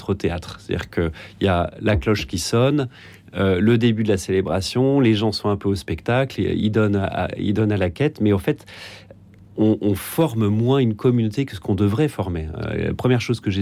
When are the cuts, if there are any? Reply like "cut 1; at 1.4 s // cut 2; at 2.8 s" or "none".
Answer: none